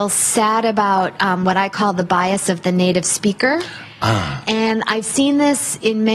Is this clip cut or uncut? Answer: uncut